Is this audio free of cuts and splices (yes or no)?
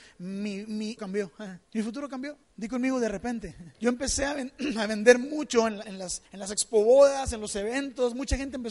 no